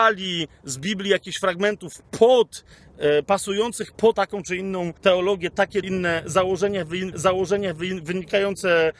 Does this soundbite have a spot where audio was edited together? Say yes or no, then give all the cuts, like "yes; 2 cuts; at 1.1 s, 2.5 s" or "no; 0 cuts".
yes; 4 cuts; at 4.1 s, 5.0 s, 5.8 s, 7.1 s